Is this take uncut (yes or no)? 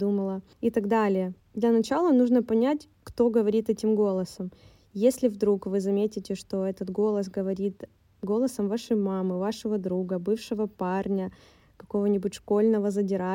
yes